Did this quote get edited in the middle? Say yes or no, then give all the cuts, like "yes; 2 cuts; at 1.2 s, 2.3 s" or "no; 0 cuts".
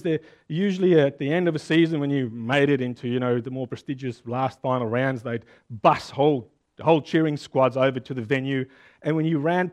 no; 0 cuts